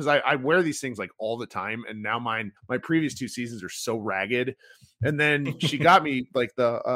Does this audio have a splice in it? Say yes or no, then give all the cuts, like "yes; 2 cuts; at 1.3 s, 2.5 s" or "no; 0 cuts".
yes; 1 cut; at 2.6 s